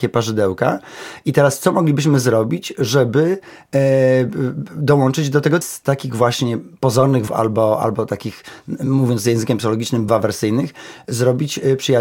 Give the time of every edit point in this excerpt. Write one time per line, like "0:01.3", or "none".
0:05.6
0:07.3
0:10.1